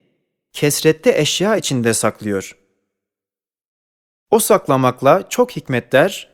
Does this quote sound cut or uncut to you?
uncut